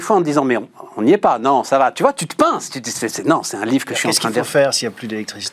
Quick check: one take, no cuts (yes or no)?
yes